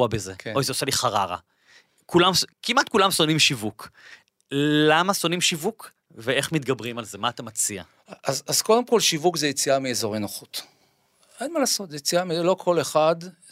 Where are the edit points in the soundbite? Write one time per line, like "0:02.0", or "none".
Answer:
0:02.5